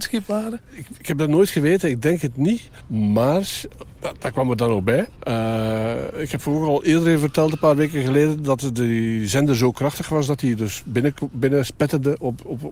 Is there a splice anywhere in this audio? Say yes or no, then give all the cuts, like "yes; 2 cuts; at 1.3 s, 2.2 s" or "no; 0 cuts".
no; 0 cuts